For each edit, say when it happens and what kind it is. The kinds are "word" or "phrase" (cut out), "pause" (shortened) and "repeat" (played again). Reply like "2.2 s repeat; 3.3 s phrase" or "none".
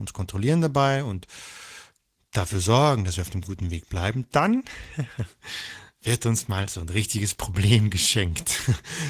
none